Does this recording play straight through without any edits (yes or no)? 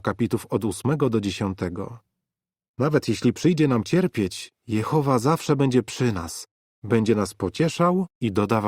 yes